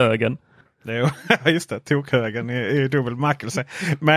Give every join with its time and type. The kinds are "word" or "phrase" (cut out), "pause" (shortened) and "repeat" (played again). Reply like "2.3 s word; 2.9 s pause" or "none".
none